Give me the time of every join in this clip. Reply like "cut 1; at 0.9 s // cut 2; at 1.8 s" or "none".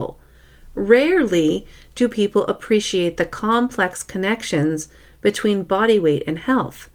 none